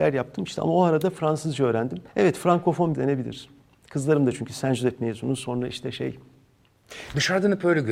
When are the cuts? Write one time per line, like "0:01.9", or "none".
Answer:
0:02.1
0:02.9